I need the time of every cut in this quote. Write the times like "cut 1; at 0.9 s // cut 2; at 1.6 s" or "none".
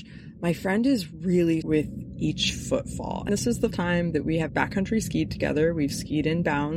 cut 1; at 1.6 s // cut 2; at 3.3 s // cut 3; at 3.7 s // cut 4; at 4.5 s